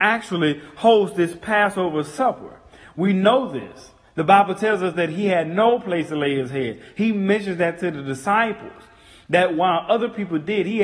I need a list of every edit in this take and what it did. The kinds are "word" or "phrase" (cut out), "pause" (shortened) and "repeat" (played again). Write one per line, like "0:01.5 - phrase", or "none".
none